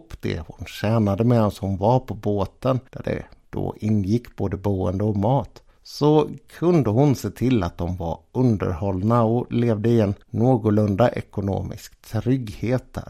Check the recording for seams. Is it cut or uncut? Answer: cut